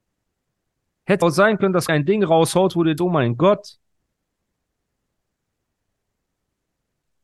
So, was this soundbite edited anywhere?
yes; 3 cuts; at 1.2 s, 1.9 s, 3.0 s

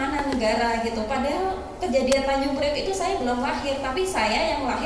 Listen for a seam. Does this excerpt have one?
no; 0 cuts

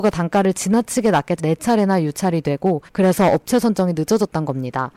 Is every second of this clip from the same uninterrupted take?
no; 2 cuts; at 1.4 s, 2.9 s

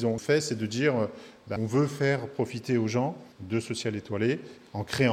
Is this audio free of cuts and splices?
no; 2 cuts; at 1.6 s, 3.3 s

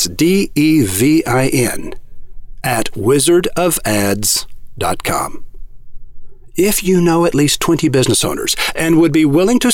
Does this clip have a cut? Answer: no; 0 cuts

